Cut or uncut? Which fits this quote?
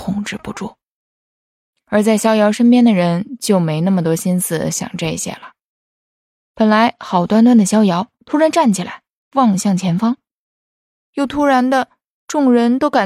cut